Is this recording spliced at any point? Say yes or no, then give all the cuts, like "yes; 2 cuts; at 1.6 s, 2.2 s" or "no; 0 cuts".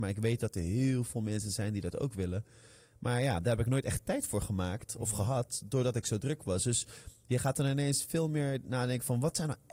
no; 0 cuts